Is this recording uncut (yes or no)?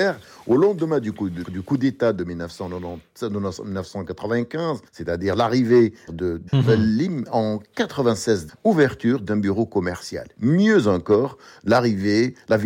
no